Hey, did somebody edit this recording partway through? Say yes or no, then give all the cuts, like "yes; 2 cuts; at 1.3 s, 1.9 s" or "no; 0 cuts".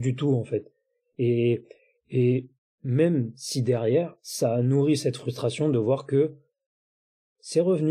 no; 0 cuts